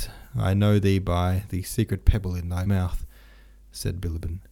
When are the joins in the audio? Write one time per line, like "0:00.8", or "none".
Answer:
0:02.7